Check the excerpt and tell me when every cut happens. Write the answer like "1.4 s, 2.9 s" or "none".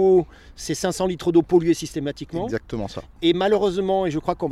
none